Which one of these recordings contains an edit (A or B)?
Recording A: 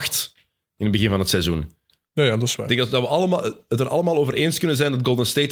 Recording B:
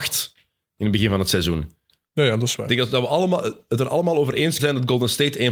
B